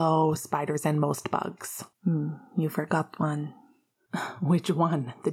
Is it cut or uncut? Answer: cut